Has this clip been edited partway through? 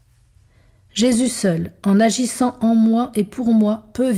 no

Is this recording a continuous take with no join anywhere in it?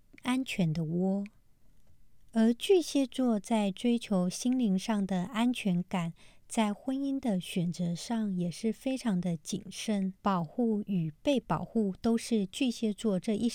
no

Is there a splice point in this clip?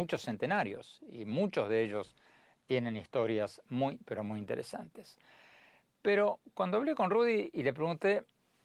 no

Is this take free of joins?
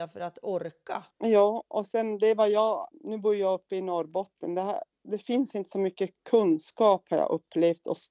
no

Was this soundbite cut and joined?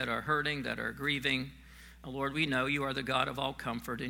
no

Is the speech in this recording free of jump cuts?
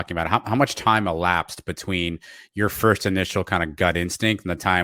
yes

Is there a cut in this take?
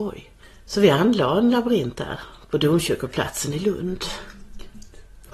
no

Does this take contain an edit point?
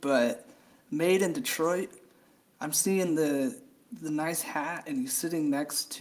no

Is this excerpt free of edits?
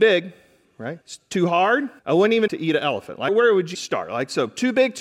no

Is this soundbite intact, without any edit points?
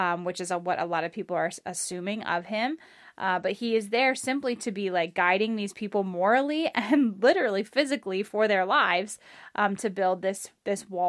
yes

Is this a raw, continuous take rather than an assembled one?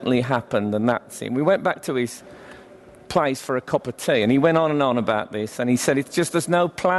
yes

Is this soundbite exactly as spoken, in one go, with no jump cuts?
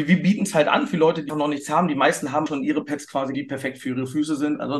no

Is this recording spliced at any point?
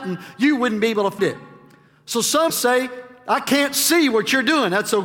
yes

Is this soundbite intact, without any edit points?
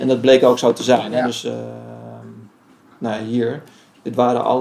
yes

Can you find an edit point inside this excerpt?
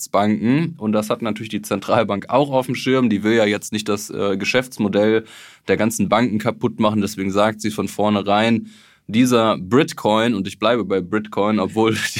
no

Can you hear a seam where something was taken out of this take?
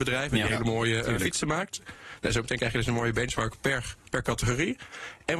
no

